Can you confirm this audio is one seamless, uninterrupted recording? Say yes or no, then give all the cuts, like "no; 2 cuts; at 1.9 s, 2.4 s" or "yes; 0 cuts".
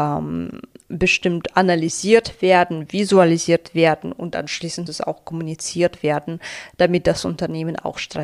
no; 1 cut; at 4.9 s